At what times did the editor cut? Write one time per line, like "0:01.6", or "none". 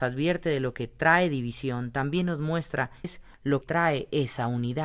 0:03.0
0:03.6